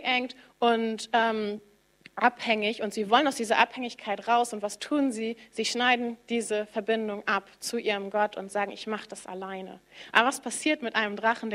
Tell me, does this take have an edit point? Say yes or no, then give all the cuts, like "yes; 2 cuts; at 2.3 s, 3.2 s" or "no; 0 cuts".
no; 0 cuts